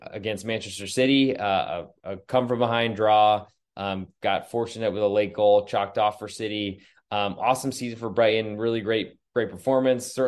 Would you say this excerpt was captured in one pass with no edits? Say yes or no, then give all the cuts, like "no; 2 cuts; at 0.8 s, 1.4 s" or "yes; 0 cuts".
yes; 0 cuts